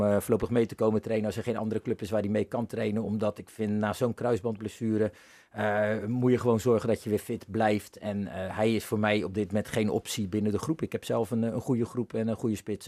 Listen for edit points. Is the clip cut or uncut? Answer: uncut